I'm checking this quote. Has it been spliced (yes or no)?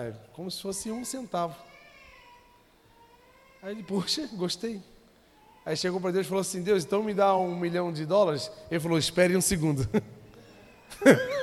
no